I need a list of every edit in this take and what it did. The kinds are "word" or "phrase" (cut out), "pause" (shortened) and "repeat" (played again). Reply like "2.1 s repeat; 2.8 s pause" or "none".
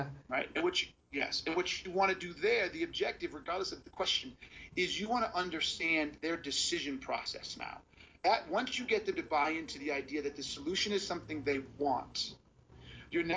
none